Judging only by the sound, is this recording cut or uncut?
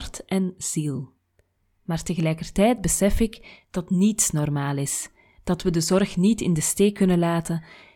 uncut